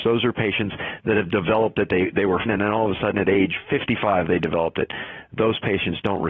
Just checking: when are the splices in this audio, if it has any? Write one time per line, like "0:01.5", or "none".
0:02.5